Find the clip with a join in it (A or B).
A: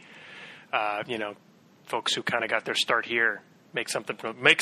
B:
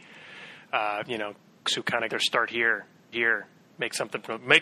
B